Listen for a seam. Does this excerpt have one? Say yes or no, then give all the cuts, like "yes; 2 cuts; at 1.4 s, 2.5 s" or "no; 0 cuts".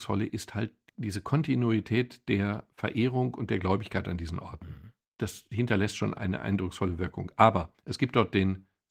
no; 0 cuts